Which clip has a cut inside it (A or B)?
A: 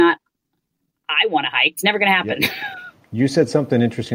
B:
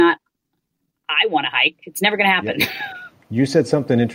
A